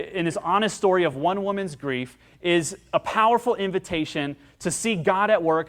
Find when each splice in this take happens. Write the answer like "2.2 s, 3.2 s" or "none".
none

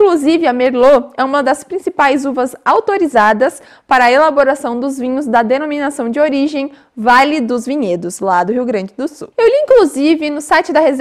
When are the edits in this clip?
9.3 s

